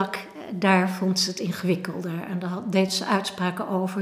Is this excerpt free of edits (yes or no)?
yes